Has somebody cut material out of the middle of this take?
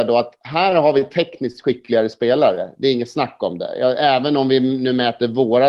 no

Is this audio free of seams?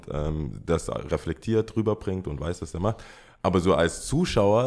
yes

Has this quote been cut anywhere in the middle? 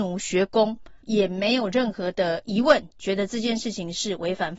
yes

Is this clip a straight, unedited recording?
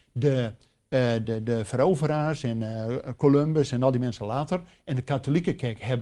no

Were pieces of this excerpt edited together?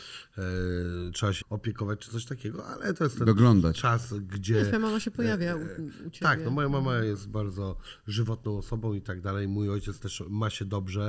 yes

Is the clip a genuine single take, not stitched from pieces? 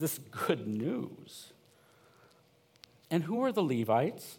yes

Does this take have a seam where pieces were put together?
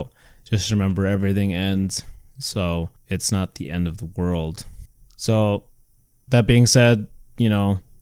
no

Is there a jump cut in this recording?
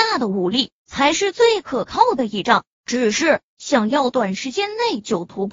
yes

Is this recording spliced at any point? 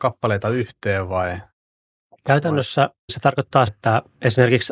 yes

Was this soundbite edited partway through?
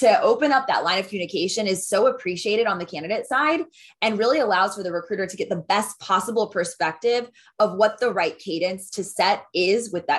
no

